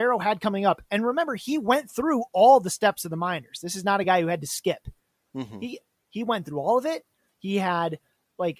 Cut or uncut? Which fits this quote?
uncut